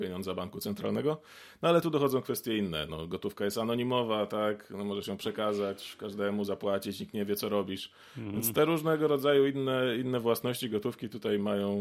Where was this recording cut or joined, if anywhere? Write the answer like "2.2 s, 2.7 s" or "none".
none